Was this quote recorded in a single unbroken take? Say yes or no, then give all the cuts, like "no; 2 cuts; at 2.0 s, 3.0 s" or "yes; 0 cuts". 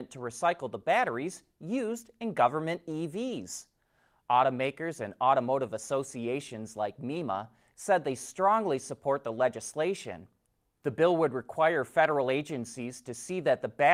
yes; 0 cuts